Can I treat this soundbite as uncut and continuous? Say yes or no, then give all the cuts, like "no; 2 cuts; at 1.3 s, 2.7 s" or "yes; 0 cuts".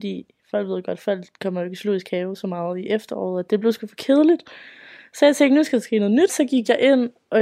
no; 1 cut; at 6.3 s